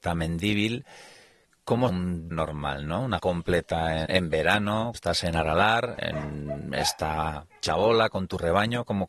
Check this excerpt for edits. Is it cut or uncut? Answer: cut